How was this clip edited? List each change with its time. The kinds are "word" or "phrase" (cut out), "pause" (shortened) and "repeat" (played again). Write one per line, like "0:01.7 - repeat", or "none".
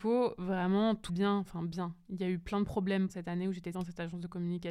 0:01.1 - phrase
0:03.1 - word
0:03.7 - word